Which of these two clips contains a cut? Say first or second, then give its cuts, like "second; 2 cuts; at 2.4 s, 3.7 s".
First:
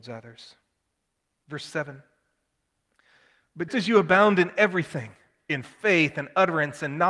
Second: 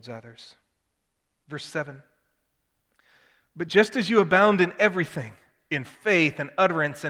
first; 1 cut; at 3.7 s